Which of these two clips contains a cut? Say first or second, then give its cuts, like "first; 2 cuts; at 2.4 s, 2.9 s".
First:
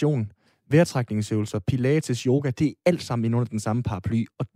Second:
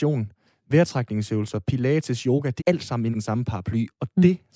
second; 2 cuts; at 2.6 s, 3.1 s